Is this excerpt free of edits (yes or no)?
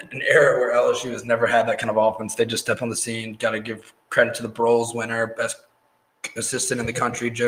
yes